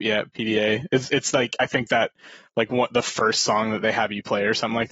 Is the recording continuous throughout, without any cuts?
yes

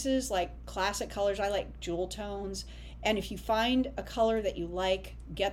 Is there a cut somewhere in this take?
no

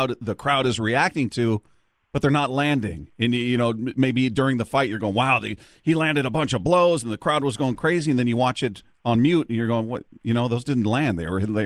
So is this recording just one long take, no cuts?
yes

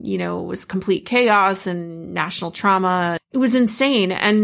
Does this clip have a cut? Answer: yes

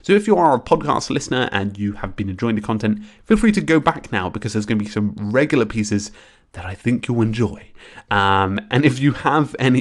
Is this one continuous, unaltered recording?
yes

